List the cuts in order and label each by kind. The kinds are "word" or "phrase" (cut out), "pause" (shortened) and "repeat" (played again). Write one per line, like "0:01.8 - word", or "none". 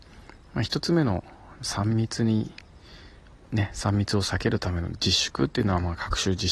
none